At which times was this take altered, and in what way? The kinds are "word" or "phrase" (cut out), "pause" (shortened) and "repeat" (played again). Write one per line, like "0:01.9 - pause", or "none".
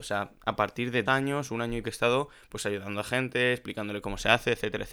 0:01.1 - word
0:01.8 - word